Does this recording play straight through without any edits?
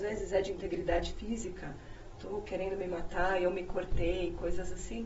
yes; 0 cuts

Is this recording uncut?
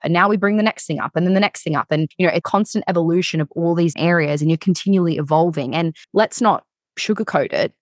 no; 4 cuts; at 2.1 s, 2.4 s, 3.9 s, 6.0 s

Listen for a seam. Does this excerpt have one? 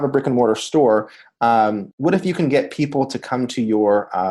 yes; 1 cut; at 1.9 s

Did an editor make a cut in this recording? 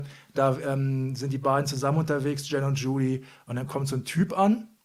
no; 0 cuts

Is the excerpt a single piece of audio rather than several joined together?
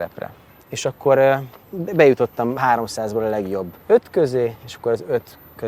no; 2 cuts; at 1.6 s, 3.8 s

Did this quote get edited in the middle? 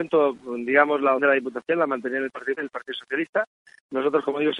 yes; 2 cuts; at 1.2 s, 2.6 s

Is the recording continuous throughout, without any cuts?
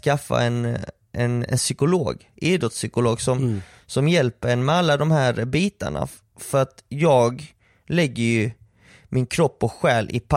yes; 0 cuts

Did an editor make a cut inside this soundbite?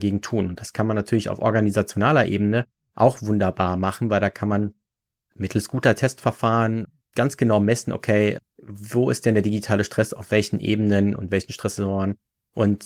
no; 0 cuts

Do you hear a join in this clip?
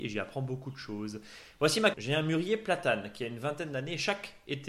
yes; 1 cut; at 1.9 s

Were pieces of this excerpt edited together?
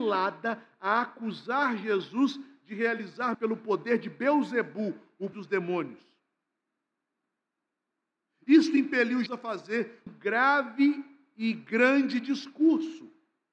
yes; 4 cuts; at 3.3 s, 5.3 s, 9.3 s, 10.1 s

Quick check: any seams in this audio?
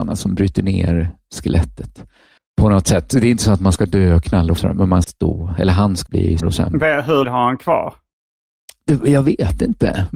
yes; 6 cuts; at 2.4 s, 4.6 s, 5.0 s, 6.1 s, 6.4 s, 7.2 s

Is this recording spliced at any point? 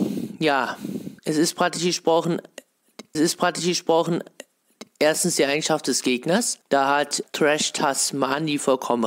yes; 4 cuts; at 1.2 s, 3.1 s, 6.6 s, 7.2 s

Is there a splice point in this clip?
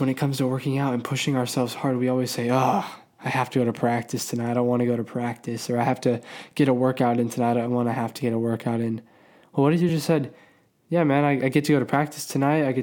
no; 0 cuts

